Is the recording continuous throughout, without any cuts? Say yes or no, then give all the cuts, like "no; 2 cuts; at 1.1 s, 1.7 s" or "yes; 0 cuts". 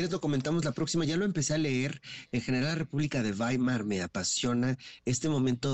yes; 0 cuts